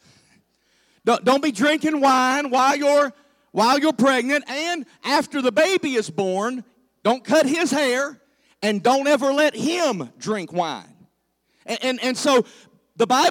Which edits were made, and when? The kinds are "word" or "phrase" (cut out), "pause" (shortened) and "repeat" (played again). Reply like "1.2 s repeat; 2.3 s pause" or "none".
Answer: none